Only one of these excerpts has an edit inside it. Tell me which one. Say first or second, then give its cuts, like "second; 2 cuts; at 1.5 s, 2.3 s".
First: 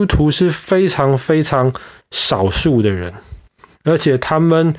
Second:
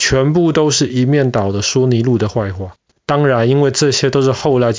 second; 1 cut; at 2.9 s